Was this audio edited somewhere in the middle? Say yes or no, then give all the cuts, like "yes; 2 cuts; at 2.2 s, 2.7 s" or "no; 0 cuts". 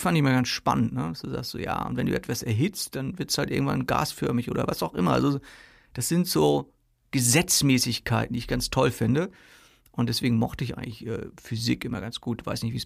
no; 0 cuts